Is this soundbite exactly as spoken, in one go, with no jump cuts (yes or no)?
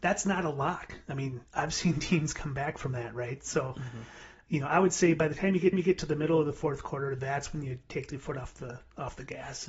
no